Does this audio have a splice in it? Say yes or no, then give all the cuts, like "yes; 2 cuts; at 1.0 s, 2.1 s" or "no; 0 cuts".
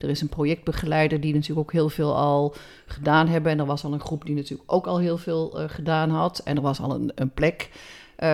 no; 0 cuts